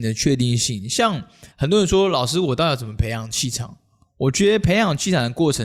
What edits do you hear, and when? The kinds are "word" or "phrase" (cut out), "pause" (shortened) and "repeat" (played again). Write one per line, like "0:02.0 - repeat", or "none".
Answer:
0:01.5 - pause